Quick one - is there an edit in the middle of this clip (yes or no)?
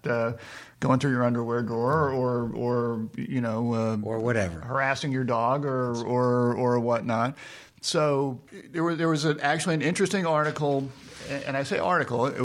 yes